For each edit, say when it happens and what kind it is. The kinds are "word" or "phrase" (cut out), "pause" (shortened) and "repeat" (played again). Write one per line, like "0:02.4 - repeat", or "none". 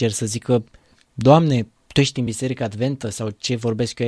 none